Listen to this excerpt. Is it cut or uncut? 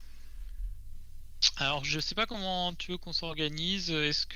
uncut